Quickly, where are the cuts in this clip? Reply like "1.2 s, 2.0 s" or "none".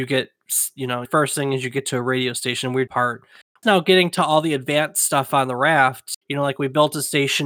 1.0 s, 2.9 s, 3.6 s, 6.2 s